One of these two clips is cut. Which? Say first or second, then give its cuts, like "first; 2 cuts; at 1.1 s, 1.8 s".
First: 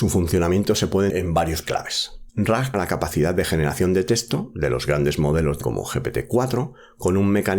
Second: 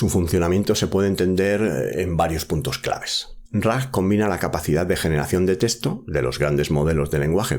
first; 4 cuts; at 1.1 s, 1.6 s, 2.7 s, 5.6 s